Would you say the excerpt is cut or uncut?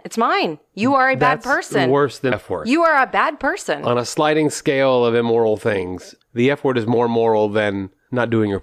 cut